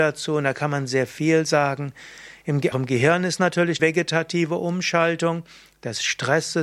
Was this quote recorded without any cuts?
no; 2 cuts; at 2.7 s, 3.8 s

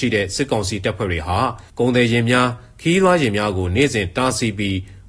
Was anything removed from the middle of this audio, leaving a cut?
yes; 1 cut; at 1.7 s

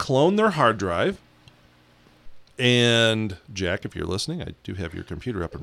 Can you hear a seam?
yes; 1 cut; at 2.5 s

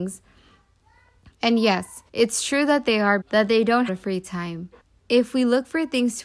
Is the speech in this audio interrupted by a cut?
yes; 4 cuts; at 2.1 s, 3.2 s, 3.9 s, 4.8 s

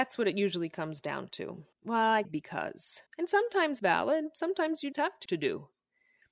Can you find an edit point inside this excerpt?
yes; 6 cuts; at 1.7 s, 2.2 s, 3.1 s, 3.8 s, 4.9 s, 5.3 s

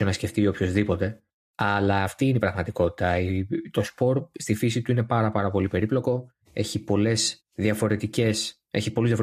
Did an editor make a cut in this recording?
yes; 3 cuts; at 1.3 s, 6.4 s, 7.4 s

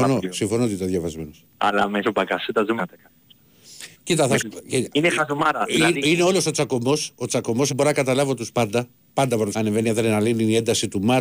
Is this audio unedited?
no; 8 cuts; at 1.5 s, 2.0 s, 2.8 s, 3.9 s, 4.4 s, 7.7 s, 8.5 s, 9.5 s

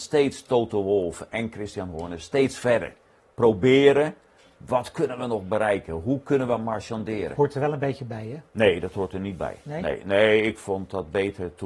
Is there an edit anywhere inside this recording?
yes; 2 cuts; at 8.5 s, 9.6 s

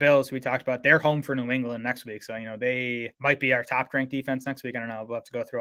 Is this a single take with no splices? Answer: yes; 0 cuts

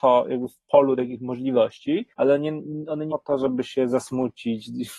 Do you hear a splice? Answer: yes; 2 cuts; at 2.1 s, 3.1 s

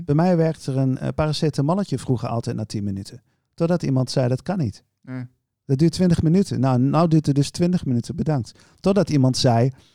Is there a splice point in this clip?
no; 0 cuts

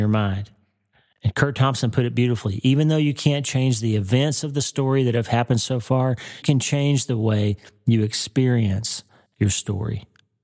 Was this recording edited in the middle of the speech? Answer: yes; 1 cut; at 6.4 s

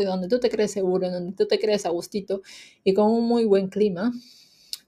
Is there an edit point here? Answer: no; 0 cuts

